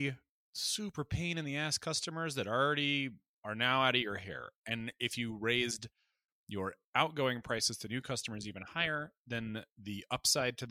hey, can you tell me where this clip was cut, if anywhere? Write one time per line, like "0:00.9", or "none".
none